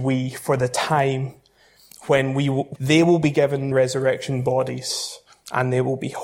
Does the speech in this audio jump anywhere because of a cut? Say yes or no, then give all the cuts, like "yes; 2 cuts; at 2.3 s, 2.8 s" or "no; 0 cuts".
yes; 2 cuts; at 2.8 s, 3.7 s